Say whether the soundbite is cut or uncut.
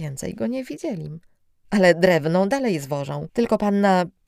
uncut